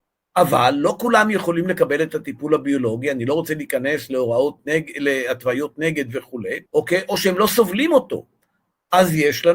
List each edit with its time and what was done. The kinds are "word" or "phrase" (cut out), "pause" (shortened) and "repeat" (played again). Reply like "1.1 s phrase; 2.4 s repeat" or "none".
6.7 s pause